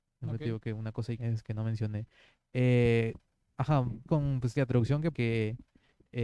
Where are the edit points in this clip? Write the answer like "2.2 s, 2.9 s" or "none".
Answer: 1.2 s, 4.1 s, 4.5 s, 5.1 s